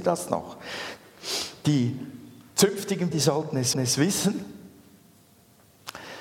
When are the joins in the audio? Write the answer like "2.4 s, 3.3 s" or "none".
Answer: 3.1 s, 3.7 s

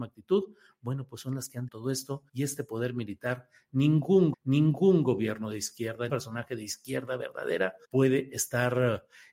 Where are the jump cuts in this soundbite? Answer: 1.7 s, 2.3 s, 4.3 s, 6.1 s, 7.8 s

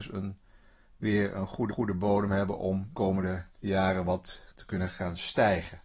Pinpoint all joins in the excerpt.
1.7 s, 2.9 s, 3.5 s, 4.5 s

